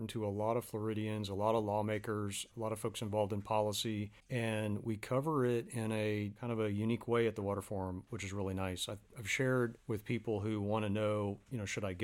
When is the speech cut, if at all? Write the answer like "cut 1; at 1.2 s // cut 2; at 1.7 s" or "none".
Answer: cut 1; at 4.2 s // cut 2; at 9.8 s

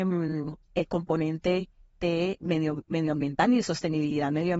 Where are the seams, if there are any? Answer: cut 1; at 2.4 s

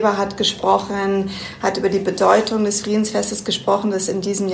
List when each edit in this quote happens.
none

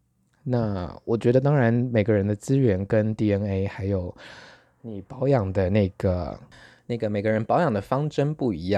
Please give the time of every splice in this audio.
none

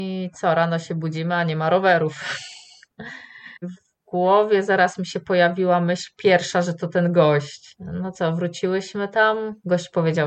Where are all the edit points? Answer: cut 1; at 3.6 s

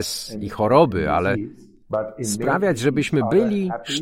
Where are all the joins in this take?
none

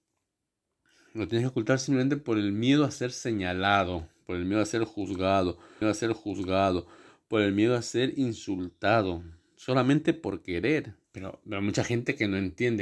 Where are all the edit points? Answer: cut 1; at 5.8 s // cut 2; at 11.0 s

